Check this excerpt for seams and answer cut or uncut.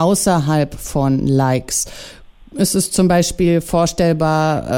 uncut